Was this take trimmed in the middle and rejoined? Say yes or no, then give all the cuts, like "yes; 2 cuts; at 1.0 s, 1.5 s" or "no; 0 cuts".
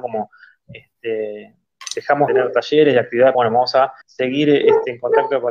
yes; 3 cuts; at 2.3 s, 3.3 s, 4.0 s